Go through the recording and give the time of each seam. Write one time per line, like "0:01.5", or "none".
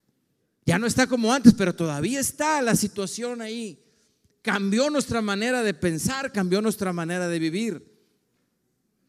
none